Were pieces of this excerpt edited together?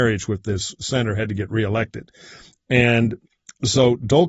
no; 0 cuts

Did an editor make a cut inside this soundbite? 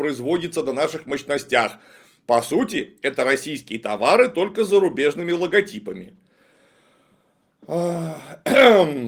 no; 0 cuts

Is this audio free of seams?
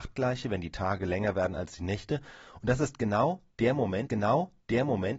no; 1 cut; at 4.1 s

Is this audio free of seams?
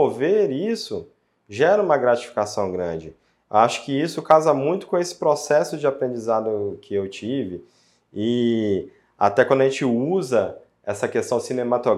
yes; 0 cuts

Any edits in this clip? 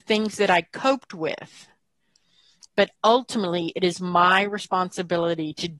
no; 0 cuts

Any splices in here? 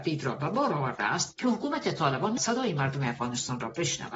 yes; 1 cut; at 2.4 s

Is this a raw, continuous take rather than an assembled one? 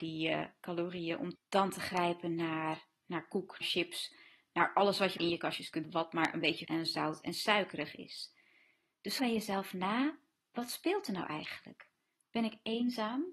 no; 6 cuts; at 3.0 s, 3.6 s, 5.2 s, 5.8 s, 6.6 s, 9.2 s

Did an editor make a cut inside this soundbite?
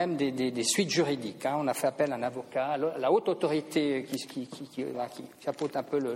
yes; 1 cut; at 4.9 s

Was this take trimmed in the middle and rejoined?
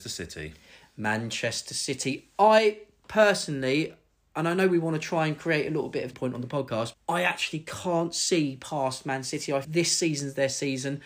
yes; 3 cuts; at 6.1 s, 6.9 s, 9.6 s

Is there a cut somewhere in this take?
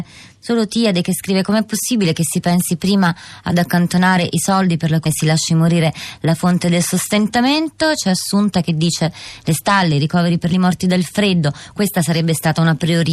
yes; 2 cuts; at 5.1 s, 10.5 s

